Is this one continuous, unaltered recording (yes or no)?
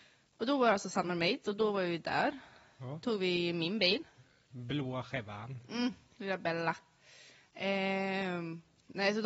yes